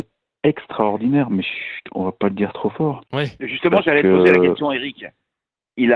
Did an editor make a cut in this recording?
yes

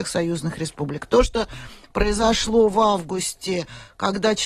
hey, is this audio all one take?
yes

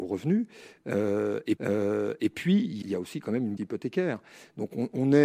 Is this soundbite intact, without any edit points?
no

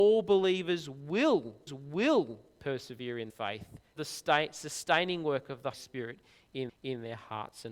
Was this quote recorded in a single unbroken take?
no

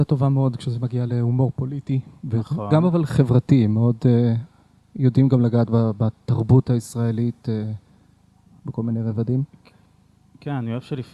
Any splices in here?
no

